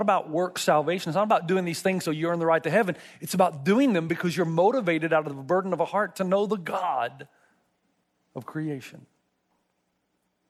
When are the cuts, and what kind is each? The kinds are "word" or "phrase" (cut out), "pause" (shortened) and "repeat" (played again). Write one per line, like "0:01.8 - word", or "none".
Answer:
none